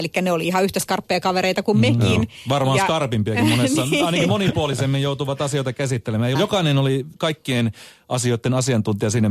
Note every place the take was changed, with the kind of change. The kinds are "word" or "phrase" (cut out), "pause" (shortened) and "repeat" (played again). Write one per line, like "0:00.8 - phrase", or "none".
0:06.3 - phrase
0:07.2 - pause